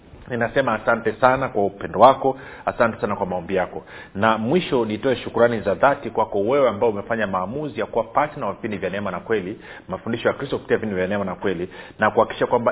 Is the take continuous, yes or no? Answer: yes